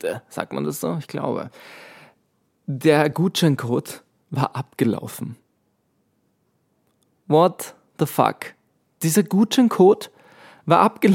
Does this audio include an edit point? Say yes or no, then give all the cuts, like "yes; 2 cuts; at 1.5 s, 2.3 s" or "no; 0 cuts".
no; 0 cuts